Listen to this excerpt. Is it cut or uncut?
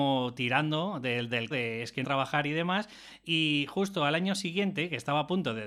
cut